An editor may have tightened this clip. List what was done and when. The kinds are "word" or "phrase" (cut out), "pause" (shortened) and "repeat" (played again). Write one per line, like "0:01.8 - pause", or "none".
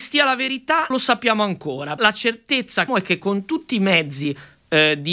0:00.9 - word
0:02.0 - word
0:02.9 - word